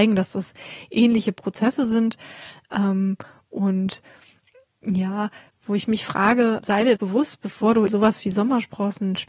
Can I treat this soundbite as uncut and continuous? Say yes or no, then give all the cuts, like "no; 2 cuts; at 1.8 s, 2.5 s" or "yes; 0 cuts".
no; 3 cuts; at 6.6 s, 7.0 s, 7.9 s